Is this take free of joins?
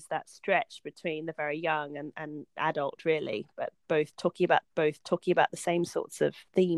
no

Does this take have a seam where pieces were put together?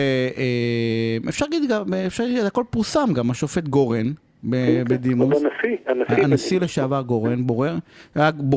no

